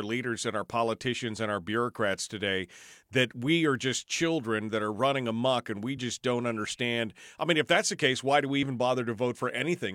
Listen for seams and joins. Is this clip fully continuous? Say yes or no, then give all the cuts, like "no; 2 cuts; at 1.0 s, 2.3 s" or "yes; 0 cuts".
yes; 0 cuts